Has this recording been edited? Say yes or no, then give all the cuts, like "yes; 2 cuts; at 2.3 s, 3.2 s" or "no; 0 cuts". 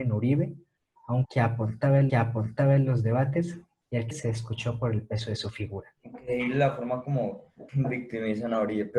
yes; 5 cuts; at 1.2 s, 2.1 s, 4.1 s, 6.0 s, 7.7 s